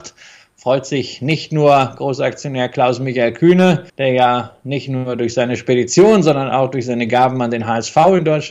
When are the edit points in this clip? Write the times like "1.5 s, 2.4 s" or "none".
3.9 s